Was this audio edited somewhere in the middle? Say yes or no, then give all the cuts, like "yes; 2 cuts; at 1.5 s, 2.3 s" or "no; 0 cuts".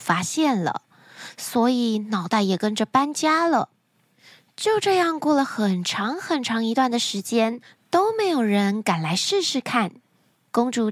no; 0 cuts